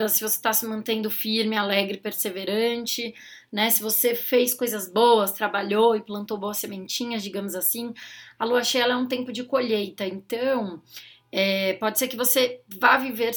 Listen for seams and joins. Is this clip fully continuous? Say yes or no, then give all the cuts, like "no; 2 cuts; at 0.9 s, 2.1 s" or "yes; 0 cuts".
yes; 0 cuts